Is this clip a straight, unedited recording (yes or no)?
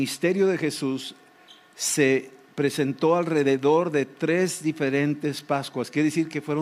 yes